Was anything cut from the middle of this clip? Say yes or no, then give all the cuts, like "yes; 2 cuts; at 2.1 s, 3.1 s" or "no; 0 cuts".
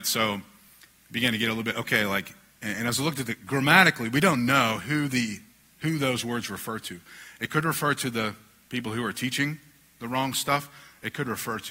no; 0 cuts